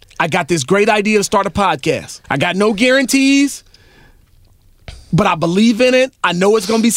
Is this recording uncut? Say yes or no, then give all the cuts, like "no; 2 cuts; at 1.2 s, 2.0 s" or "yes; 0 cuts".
no; 1 cut; at 2.2 s